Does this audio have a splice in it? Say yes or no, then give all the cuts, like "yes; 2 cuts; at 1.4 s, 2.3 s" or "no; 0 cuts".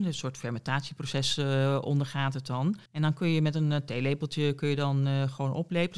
yes; 1 cut; at 2.9 s